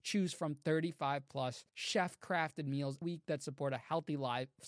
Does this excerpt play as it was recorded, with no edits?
no; 2 cuts; at 1.7 s, 3.0 s

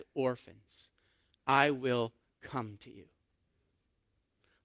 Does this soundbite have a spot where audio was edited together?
no; 0 cuts

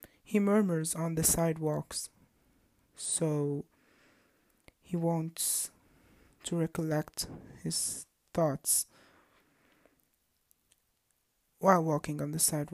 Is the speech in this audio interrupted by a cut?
no; 0 cuts

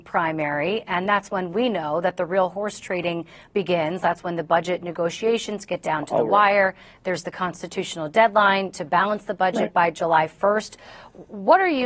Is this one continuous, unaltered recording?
yes; 0 cuts

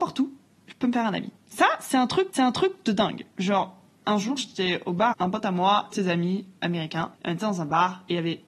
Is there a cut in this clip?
yes; 5 cuts; at 1.4 s, 2.3 s, 5.1 s, 5.9 s, 7.1 s

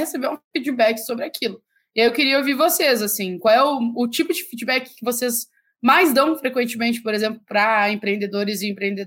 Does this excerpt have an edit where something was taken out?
no; 0 cuts

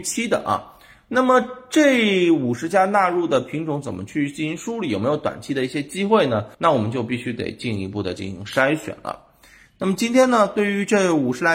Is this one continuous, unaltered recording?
no; 1 cut; at 6.5 s

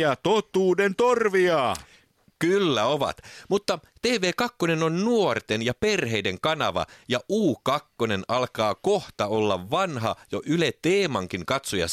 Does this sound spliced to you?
no; 0 cuts

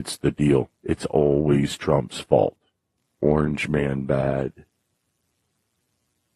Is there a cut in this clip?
no; 0 cuts

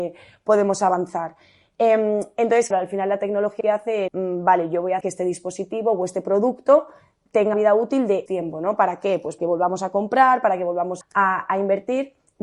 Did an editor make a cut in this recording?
yes; 8 cuts; at 2.7 s, 3.6 s, 4.1 s, 5.0 s, 7.5 s, 8.3 s, 9.4 s, 11.0 s

